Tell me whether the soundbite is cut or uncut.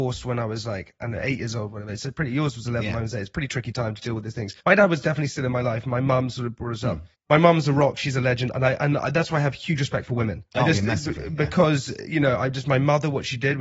cut